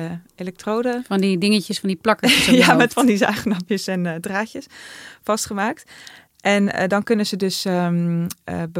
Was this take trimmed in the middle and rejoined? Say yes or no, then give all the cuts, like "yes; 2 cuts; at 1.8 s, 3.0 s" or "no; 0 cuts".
no; 0 cuts